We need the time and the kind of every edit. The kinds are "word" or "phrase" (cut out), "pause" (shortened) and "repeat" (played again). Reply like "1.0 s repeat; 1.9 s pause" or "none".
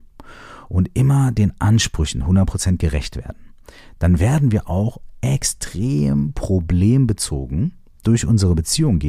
none